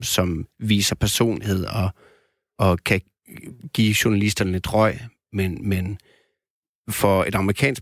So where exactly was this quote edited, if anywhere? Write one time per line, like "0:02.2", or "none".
none